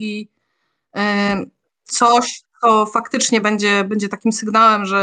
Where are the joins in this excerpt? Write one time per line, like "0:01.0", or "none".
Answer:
none